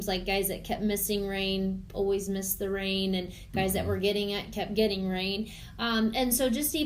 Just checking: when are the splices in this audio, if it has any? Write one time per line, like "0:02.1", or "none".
none